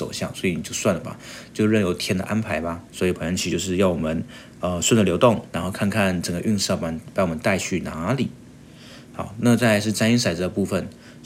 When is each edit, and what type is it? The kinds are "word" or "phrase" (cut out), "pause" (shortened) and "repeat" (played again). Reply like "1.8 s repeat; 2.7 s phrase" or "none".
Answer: 2.9 s pause; 5.5 s pause